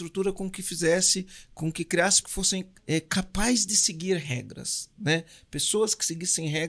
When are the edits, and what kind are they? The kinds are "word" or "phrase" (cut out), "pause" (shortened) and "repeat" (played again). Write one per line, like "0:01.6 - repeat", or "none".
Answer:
0:02.2 - word
0:02.8 - pause